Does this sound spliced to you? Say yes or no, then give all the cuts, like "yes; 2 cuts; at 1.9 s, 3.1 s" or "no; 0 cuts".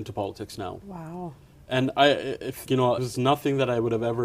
yes; 2 cuts; at 2.7 s, 3.0 s